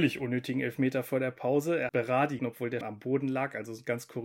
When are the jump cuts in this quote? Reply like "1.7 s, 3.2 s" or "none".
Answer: 1.9 s, 2.4 s, 2.8 s